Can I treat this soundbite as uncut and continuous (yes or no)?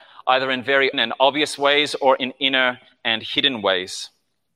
no